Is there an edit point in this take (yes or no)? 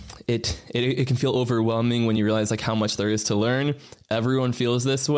no